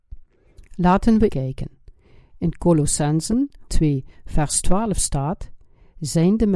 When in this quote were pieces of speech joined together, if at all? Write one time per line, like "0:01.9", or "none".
0:01.3
0:03.7